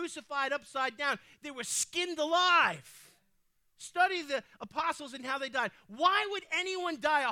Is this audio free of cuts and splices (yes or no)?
yes